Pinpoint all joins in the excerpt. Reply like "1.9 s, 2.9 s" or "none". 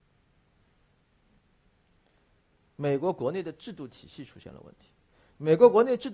none